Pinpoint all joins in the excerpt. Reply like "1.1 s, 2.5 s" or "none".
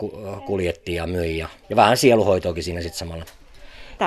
1.6 s